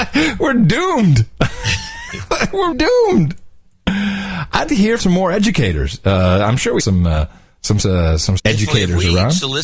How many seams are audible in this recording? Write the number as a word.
six